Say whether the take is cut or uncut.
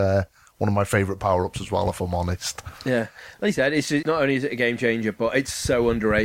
cut